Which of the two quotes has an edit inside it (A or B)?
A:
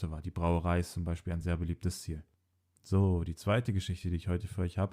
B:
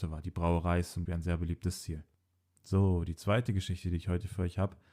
B